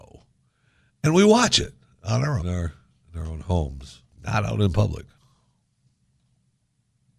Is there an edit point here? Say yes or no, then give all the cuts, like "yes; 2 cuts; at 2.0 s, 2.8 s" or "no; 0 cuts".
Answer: yes; 2 cuts; at 2.4 s, 4.1 s